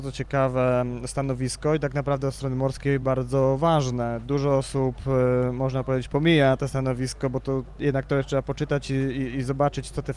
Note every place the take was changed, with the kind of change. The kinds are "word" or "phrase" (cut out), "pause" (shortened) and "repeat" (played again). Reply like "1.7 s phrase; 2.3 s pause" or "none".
none